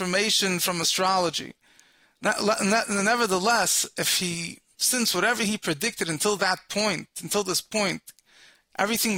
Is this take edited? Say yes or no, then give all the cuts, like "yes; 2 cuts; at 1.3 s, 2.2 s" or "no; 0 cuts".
no; 0 cuts